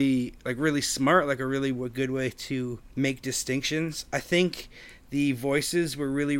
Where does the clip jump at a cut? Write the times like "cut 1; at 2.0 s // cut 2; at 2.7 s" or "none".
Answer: cut 1; at 2.8 s